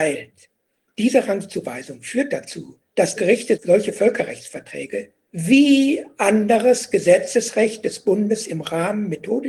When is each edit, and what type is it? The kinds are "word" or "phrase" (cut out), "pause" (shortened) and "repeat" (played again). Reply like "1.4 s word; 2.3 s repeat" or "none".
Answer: 3.2 s word